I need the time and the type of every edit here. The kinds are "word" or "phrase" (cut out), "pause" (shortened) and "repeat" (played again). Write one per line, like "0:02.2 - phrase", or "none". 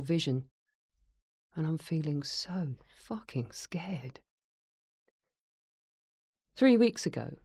none